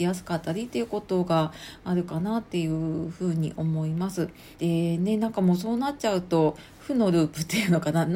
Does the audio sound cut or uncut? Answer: cut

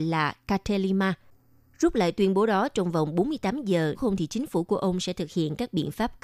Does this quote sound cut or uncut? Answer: cut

